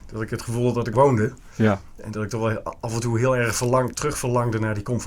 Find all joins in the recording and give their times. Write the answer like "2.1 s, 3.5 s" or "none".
0.9 s, 3.9 s